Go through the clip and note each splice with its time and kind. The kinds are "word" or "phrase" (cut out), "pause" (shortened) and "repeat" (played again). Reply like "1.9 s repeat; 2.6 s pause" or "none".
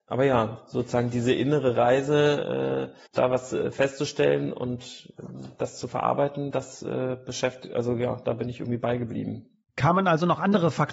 3.1 s pause